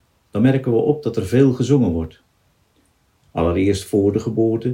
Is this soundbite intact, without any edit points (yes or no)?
yes